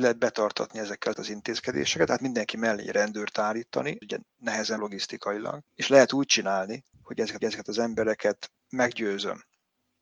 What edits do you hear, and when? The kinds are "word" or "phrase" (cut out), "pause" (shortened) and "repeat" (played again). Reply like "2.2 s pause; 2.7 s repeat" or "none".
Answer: 1.1 s word; 2.2 s word; 4.0 s word; 4.8 s word; 5.7 s pause; 6.9 s pause; 7.4 s repeat; 8.6 s pause